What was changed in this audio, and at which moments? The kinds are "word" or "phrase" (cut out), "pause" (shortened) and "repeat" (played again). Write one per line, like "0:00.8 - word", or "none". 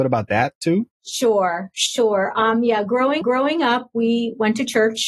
0:03.2 - repeat